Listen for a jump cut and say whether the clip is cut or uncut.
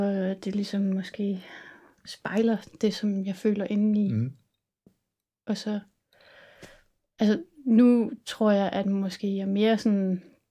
uncut